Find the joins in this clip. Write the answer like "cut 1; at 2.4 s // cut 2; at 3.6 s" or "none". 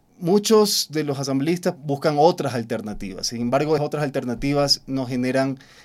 cut 1; at 1.8 s // cut 2; at 3.8 s